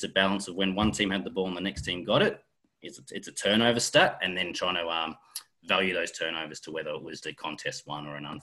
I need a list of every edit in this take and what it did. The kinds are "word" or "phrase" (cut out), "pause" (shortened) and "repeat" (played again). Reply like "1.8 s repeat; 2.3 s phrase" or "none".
7.2 s word

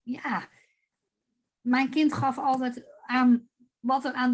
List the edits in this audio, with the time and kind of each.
none

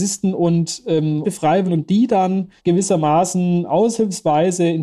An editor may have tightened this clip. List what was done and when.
1.2 s word; 1.7 s word; 2.6 s pause

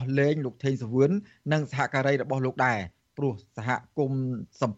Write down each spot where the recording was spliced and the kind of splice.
none

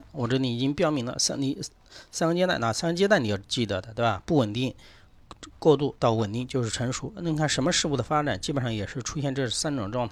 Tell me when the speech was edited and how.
6.0 s pause

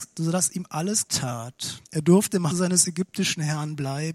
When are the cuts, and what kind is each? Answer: 1.1 s phrase; 1.8 s pause; 2.5 s word

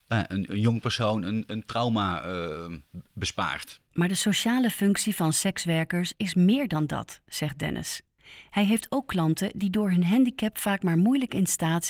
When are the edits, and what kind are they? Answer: 3.9 s pause

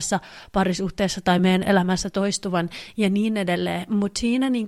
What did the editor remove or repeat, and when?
none

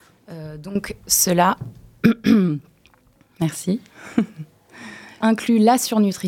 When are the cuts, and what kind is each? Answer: 5.2 s word

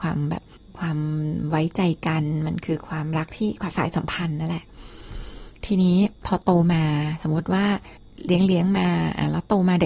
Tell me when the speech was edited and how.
6.2 s pause

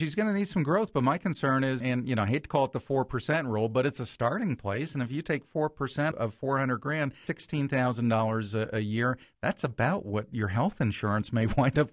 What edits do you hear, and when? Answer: 1.8 s word; 6.1 s word; 7.3 s word

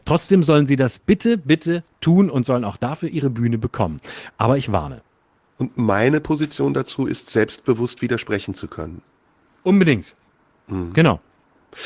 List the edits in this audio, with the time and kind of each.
none

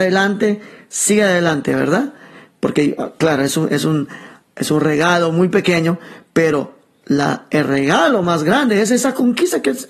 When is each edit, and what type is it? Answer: none

